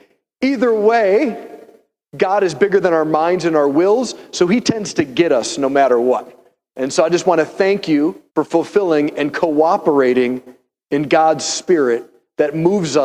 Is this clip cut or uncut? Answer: cut